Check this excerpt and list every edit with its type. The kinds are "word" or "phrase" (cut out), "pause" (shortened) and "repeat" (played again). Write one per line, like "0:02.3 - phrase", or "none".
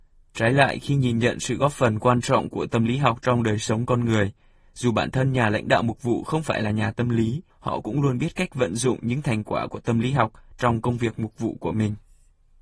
0:07.5 - pause